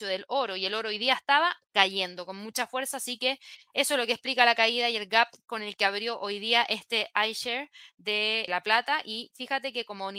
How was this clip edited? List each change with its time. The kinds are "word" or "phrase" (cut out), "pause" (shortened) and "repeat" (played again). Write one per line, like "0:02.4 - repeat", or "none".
0:01.6 - pause
0:08.5 - word